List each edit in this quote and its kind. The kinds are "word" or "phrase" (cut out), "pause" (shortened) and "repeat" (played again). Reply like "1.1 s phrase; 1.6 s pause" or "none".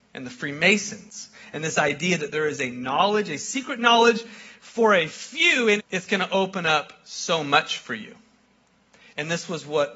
5.8 s phrase